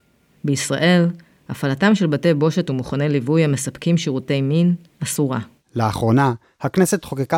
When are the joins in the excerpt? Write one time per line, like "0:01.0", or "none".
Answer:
none